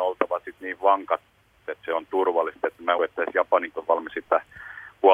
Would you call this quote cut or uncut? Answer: cut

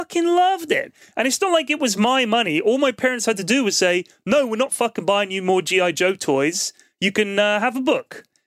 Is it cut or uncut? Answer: uncut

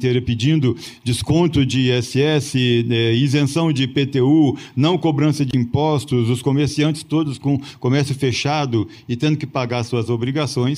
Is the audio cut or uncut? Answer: uncut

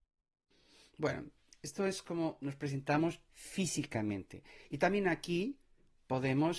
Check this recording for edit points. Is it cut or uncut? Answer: uncut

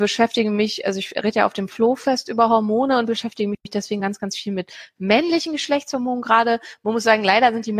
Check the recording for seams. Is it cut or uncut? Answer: uncut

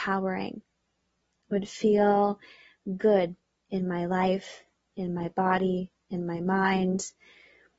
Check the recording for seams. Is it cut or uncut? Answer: uncut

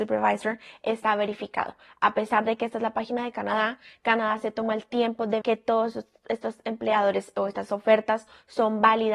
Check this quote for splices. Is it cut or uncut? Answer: cut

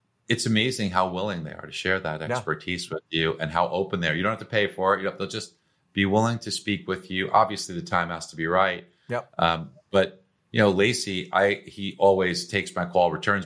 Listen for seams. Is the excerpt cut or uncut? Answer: uncut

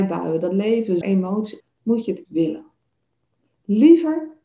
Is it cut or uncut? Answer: cut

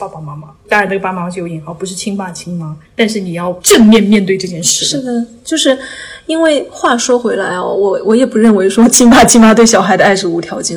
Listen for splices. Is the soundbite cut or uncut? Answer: cut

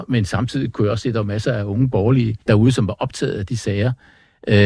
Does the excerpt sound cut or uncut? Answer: cut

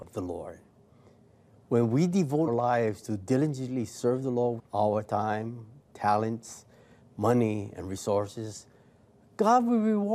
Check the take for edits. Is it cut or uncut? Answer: cut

